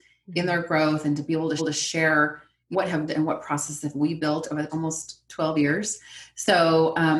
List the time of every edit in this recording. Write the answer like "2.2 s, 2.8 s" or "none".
1.6 s, 2.7 s, 3.1 s, 4.7 s